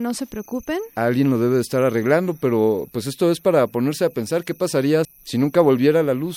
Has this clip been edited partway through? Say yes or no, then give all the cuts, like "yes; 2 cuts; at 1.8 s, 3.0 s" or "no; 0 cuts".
yes; 1 cut; at 5.0 s